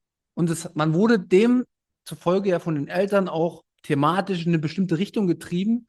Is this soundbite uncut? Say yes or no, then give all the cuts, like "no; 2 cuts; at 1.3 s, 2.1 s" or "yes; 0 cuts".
yes; 0 cuts